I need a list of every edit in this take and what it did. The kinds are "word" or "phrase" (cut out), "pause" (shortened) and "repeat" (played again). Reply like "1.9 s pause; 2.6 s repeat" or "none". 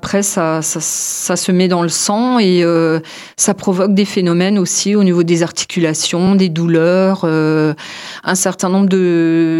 none